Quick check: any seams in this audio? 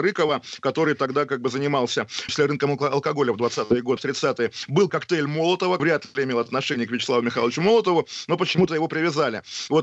yes; 4 cuts; at 2.3 s, 4.0 s, 4.9 s, 5.8 s

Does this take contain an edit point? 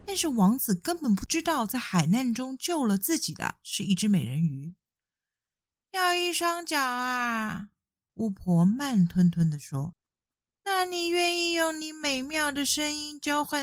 no; 0 cuts

